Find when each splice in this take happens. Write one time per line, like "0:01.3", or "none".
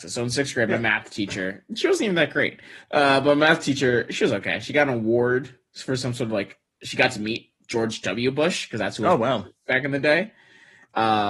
none